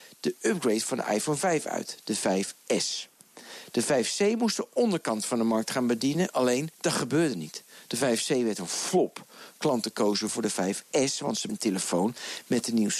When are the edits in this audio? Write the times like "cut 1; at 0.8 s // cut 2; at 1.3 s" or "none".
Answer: cut 1; at 6.7 s // cut 2; at 10.3 s // cut 3; at 11.5 s